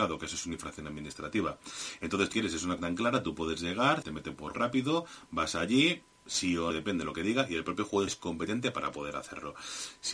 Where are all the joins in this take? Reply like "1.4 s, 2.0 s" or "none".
2.3 s, 2.8 s, 4.0 s, 4.5 s, 6.7 s, 8.1 s